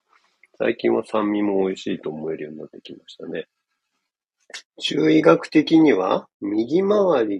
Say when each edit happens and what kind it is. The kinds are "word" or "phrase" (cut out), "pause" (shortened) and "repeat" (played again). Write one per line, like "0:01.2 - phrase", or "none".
0:04.7 - pause